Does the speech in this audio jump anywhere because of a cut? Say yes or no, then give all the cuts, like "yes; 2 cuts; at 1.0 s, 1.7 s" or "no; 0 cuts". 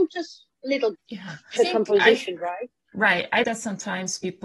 yes; 3 cuts; at 0.9 s, 1.6 s, 3.4 s